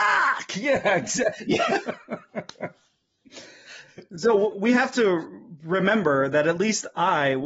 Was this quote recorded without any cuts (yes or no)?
no